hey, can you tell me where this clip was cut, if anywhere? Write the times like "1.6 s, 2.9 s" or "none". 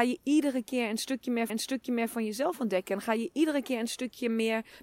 1.5 s

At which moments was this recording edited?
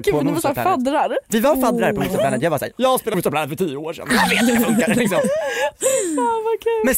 3.1 s

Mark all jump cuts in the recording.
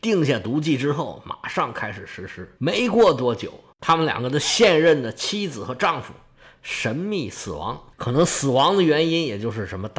2.6 s, 3.7 s, 7.9 s

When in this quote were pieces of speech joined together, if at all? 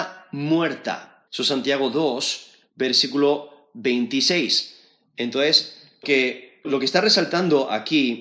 1.3 s, 6.0 s, 6.6 s

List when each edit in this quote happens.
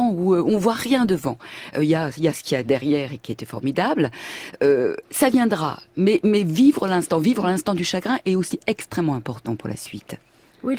5.0 s

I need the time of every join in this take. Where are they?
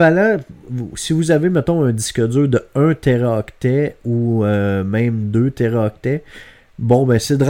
none

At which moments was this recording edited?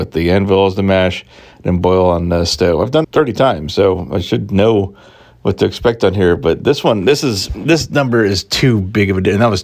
3.0 s

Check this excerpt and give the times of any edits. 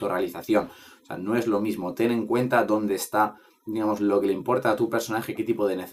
none

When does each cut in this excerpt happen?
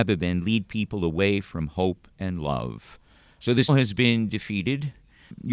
3.7 s

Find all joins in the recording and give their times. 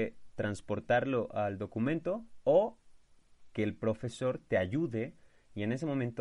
none

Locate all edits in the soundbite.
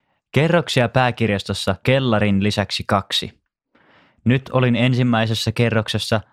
1.8 s

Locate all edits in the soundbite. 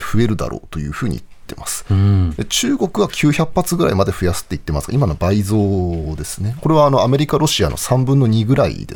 6.6 s

